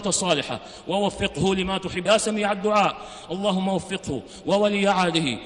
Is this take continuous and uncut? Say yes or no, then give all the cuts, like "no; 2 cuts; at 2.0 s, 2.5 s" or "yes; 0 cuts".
no; 1 cut; at 2.1 s